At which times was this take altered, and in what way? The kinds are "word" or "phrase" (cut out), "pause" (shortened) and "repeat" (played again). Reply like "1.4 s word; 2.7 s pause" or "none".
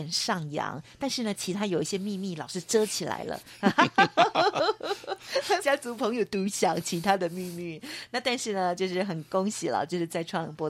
5.6 s phrase